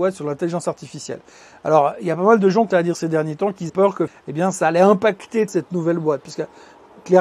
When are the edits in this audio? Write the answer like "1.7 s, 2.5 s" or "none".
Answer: 2.7 s, 3.7 s, 4.1 s, 5.5 s